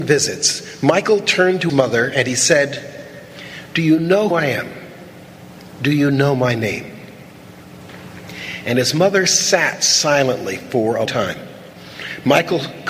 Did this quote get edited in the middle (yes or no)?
yes